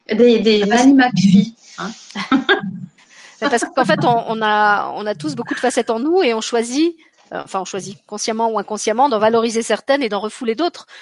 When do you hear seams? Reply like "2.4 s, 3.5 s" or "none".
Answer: none